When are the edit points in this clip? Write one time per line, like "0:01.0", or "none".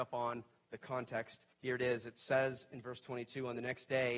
0:01.5